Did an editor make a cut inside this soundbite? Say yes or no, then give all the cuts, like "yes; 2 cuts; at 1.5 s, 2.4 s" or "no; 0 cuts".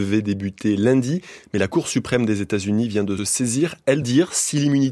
yes; 2 cuts; at 3.2 s, 4.0 s